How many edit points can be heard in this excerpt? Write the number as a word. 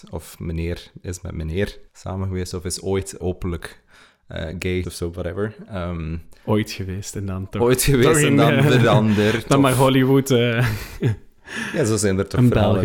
three